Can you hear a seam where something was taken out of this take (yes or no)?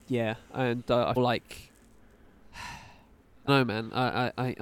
yes